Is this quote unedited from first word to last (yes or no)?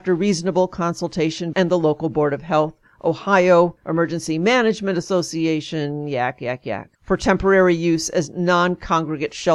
no